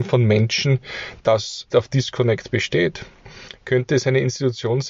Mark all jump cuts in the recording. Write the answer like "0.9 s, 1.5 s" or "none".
1.2 s, 1.7 s